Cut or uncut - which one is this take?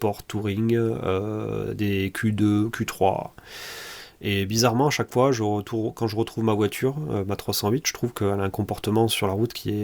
uncut